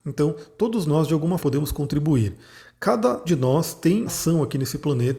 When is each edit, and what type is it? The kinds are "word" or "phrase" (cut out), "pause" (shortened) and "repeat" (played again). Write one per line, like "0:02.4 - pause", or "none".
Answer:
0:01.4 - word
0:03.2 - word
0:04.1 - word